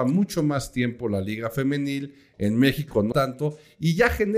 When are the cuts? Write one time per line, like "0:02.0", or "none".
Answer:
0:03.1